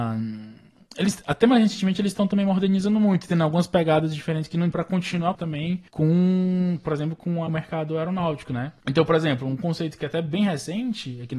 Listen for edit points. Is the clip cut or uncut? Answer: cut